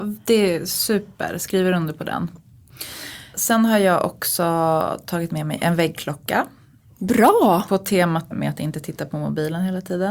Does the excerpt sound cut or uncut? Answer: cut